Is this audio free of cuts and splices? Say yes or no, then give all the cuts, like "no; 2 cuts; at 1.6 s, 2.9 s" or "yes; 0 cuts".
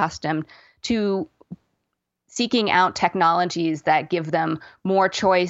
yes; 0 cuts